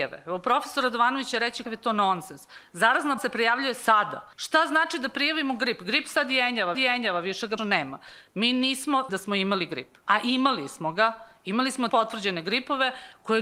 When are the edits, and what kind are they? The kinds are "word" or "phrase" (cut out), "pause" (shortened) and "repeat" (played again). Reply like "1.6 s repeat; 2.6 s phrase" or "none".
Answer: 1.6 s word; 3.2 s word; 4.3 s pause; 6.7 s repeat; 7.6 s word; 9.1 s phrase; 10.0 s pause; 11.9 s word